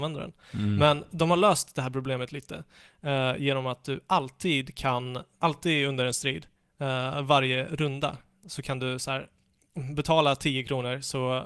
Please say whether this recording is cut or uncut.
cut